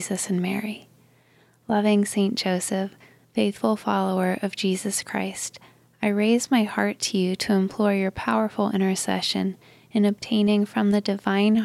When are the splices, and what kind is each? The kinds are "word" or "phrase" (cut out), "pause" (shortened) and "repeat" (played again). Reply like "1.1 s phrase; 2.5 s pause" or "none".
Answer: none